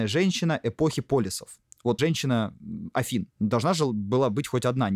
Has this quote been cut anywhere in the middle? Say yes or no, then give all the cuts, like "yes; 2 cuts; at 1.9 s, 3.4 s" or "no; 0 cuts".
yes; 2 cuts; at 2.0 s, 3.3 s